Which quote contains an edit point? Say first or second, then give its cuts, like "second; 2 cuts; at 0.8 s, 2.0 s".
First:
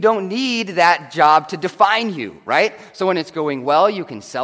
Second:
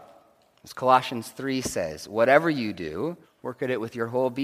second; 1 cut; at 3.2 s